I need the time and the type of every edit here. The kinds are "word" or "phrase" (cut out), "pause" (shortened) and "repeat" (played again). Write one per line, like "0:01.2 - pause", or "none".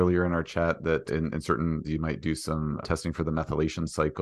0:01.1 - word
0:01.8 - word
0:02.8 - word